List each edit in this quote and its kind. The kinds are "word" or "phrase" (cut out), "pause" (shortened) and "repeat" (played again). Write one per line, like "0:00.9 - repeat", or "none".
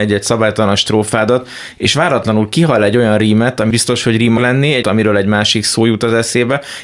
0:03.7 - phrase
0:04.4 - word
0:04.8 - phrase